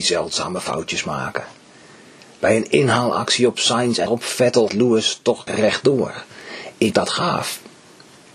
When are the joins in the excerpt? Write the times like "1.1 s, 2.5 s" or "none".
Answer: 4.1 s, 4.7 s, 5.5 s, 6.9 s